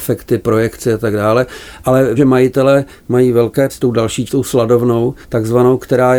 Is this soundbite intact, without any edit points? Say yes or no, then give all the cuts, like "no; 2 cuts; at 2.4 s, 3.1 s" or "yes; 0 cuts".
no; 4 cuts; at 2.2 s, 3.7 s, 4.3 s, 5.2 s